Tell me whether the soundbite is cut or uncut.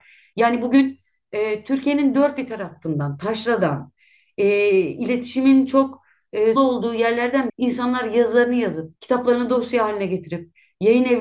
cut